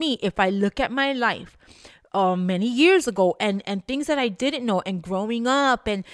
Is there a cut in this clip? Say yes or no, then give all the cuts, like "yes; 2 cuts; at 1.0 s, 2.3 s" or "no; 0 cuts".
no; 0 cuts